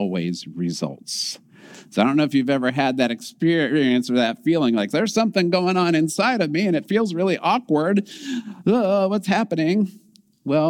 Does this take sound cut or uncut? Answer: uncut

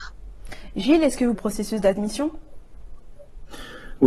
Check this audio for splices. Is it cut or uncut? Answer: cut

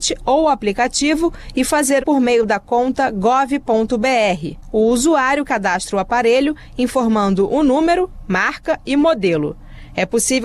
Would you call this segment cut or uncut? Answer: cut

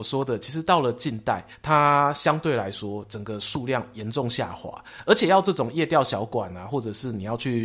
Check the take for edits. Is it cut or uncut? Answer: cut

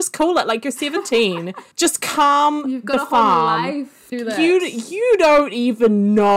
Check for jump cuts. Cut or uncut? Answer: cut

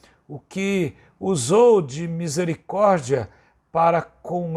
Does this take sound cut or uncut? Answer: uncut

